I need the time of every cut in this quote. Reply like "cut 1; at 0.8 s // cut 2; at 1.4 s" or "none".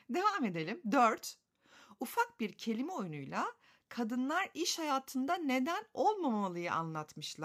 none